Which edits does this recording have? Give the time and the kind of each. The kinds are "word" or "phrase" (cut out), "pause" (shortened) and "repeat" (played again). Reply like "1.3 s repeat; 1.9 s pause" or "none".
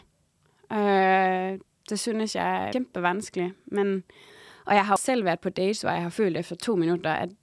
1.6 s pause; 2.7 s word; 4.3 s pause; 5.0 s word